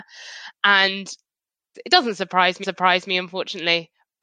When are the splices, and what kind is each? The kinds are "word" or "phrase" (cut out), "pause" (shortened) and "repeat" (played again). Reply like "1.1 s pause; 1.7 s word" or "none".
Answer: 1.7 s phrase; 2.6 s repeat